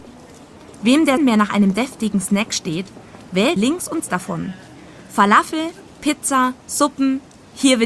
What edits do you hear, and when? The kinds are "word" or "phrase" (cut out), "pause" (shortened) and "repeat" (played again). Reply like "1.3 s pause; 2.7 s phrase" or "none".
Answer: 1.2 s word; 3.6 s phrase; 4.0 s word